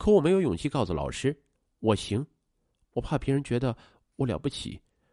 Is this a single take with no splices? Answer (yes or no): no